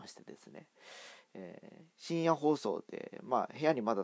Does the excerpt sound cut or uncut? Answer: cut